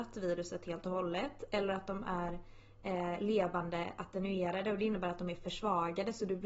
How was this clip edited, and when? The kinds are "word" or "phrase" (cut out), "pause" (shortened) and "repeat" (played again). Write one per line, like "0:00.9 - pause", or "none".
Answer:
none